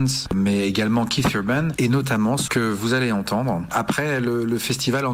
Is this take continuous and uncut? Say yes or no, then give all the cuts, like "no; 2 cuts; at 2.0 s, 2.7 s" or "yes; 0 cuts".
no; 1 cut; at 2.5 s